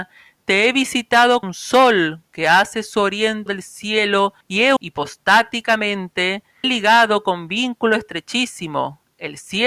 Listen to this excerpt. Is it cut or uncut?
cut